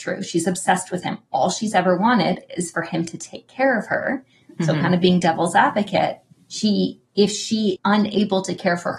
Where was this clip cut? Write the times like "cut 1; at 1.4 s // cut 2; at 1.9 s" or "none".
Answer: cut 1; at 7.8 s